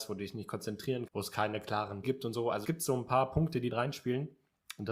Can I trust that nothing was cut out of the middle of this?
no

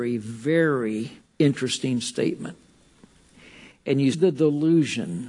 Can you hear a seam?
yes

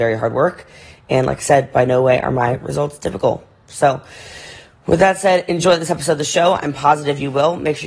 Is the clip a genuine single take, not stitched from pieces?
yes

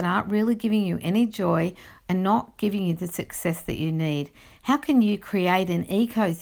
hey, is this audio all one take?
yes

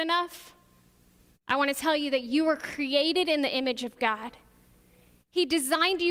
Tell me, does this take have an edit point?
no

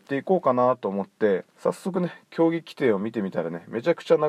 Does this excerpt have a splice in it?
yes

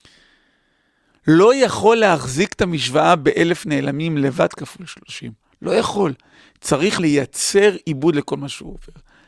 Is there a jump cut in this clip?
yes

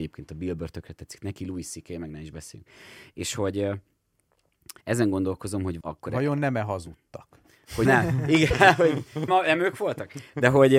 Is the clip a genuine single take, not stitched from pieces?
no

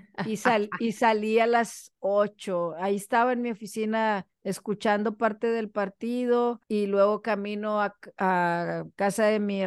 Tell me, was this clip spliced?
yes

